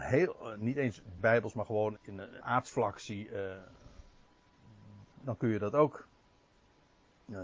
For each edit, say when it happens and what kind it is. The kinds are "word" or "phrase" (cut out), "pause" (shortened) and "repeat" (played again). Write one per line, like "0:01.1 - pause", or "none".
0:01.2 - word
0:02.0 - word
0:02.4 - word
0:05.1 - word